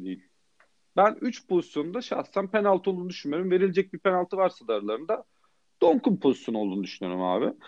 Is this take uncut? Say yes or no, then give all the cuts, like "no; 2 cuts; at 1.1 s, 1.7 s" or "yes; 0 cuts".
yes; 0 cuts